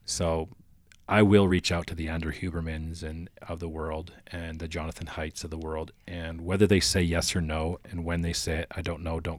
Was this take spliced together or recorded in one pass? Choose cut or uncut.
uncut